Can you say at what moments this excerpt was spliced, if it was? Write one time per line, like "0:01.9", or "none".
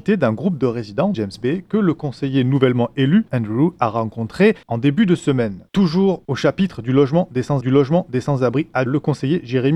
0:01.1
0:03.3
0:04.6
0:05.7
0:07.6
0:08.9